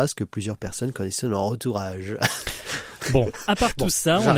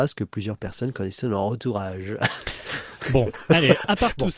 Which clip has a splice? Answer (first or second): first